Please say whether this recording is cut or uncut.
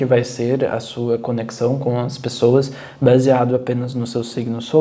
uncut